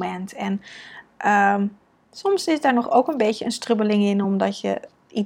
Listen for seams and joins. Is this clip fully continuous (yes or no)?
yes